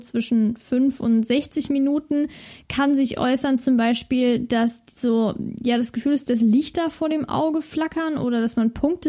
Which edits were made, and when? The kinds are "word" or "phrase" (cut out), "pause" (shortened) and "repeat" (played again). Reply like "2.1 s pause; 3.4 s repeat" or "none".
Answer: none